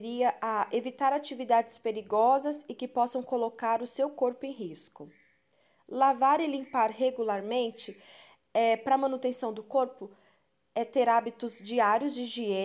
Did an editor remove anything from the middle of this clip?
no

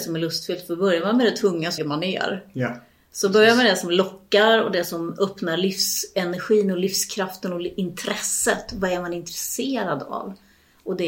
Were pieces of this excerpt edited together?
yes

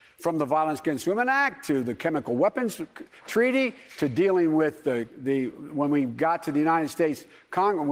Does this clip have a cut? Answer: no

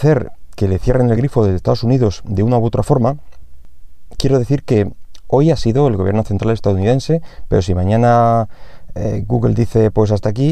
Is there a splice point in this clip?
no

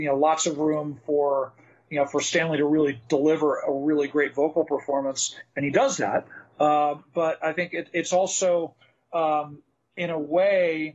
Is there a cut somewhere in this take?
no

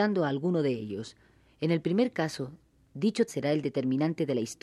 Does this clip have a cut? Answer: yes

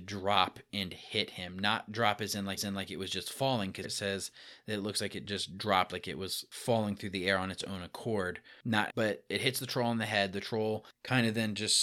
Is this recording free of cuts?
no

